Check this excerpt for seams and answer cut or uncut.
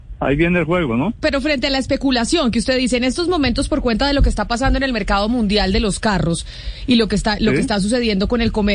uncut